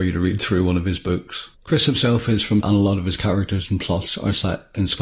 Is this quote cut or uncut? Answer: cut